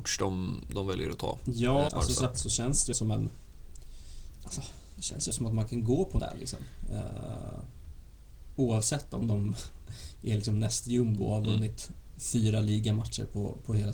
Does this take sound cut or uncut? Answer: cut